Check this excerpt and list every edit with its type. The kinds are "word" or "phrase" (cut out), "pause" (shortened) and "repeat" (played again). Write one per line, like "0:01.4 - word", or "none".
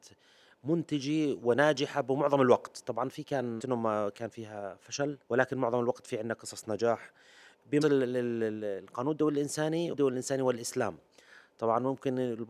0:03.6 - word
0:05.2 - pause
0:07.8 - word
0:09.9 - word